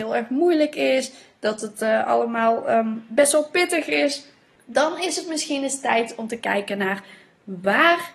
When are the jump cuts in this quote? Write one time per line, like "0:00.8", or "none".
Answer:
none